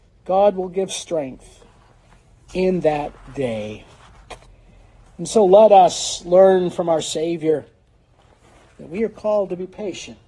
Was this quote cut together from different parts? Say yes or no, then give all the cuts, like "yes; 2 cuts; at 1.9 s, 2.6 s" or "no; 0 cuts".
no; 0 cuts